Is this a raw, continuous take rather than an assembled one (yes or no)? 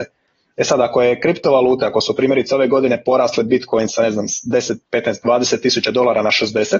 no